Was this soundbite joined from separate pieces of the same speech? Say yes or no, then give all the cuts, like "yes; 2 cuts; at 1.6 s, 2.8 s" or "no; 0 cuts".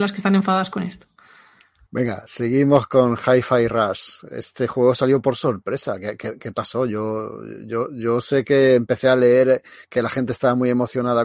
no; 0 cuts